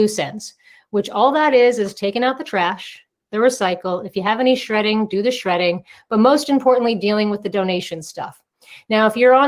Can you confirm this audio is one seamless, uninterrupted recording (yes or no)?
yes